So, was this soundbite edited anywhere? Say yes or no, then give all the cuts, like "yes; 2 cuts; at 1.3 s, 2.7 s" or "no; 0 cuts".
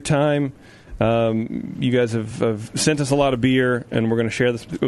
no; 0 cuts